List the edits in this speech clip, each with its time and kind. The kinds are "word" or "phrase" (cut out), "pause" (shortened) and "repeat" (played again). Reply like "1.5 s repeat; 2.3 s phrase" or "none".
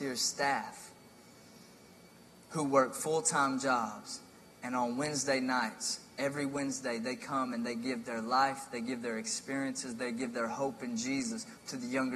none